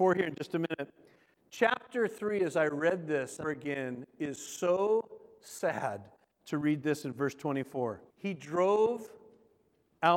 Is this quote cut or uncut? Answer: cut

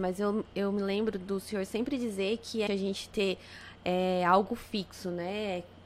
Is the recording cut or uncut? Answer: cut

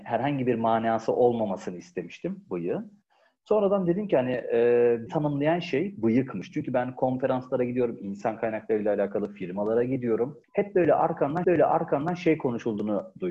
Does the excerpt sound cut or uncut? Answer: cut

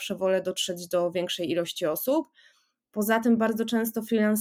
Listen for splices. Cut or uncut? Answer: uncut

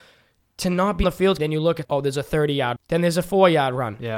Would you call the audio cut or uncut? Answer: cut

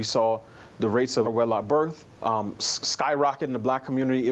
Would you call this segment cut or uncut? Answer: cut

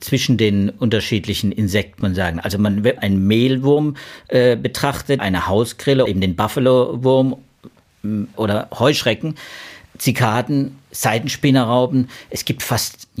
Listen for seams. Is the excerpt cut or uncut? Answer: cut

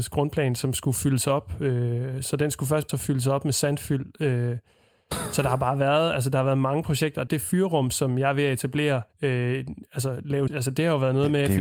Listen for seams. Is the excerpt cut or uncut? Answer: cut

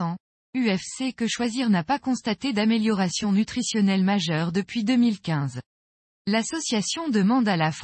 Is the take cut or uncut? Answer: uncut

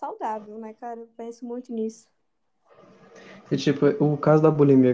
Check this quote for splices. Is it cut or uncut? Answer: uncut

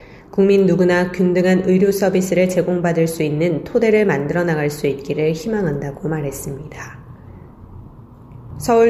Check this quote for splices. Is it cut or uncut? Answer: uncut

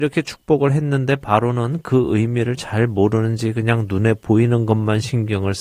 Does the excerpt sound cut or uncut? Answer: uncut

